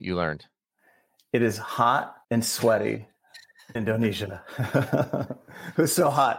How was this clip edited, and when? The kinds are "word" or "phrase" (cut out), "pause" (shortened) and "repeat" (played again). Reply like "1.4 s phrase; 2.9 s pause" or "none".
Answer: 2.2 s pause; 3.8 s word